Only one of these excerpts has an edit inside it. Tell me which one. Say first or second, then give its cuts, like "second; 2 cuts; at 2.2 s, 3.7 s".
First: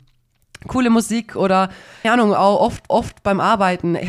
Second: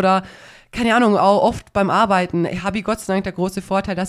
first; 2 cuts; at 2.0 s, 2.9 s